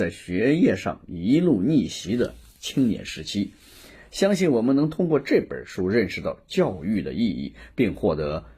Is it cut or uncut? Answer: uncut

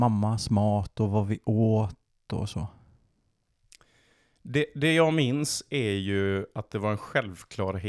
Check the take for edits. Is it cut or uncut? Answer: uncut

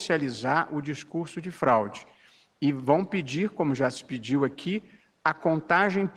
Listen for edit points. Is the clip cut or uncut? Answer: uncut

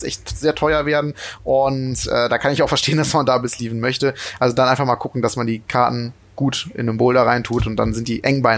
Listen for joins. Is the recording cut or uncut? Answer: uncut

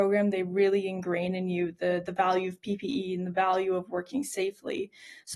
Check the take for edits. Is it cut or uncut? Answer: uncut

